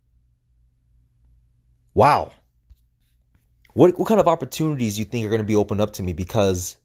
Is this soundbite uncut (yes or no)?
yes